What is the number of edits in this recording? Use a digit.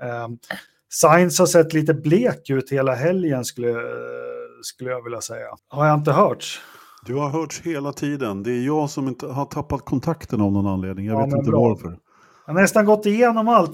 1